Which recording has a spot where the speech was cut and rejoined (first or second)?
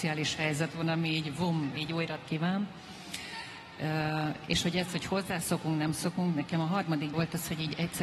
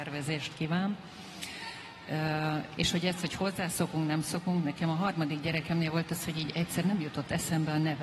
first